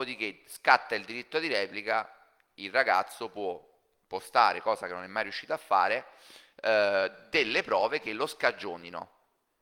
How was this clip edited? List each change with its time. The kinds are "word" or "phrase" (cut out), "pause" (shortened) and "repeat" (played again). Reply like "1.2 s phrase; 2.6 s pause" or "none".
none

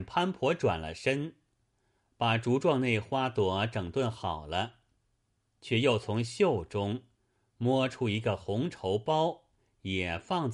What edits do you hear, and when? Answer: none

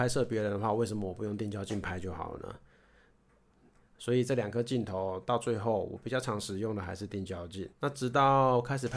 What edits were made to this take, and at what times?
7.7 s pause

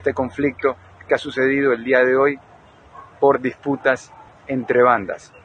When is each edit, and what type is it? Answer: none

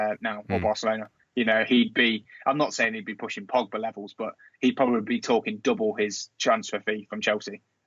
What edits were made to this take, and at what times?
none

